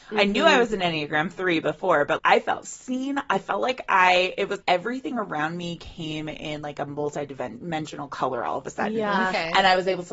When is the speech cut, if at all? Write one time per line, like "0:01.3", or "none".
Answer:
0:02.2
0:04.6